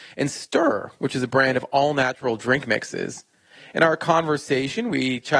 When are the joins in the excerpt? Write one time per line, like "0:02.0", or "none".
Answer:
none